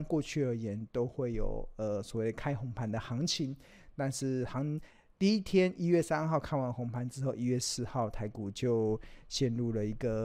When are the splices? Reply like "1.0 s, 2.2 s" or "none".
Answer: none